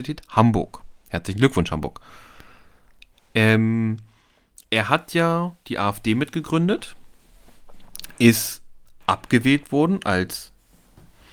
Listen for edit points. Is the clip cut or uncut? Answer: uncut